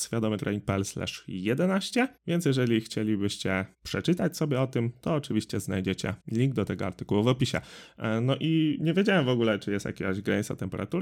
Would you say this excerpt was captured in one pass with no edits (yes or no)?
no